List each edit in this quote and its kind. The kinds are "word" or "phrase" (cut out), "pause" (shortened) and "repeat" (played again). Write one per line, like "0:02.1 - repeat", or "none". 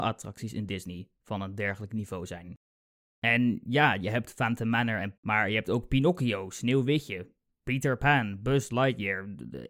0:05.2 - word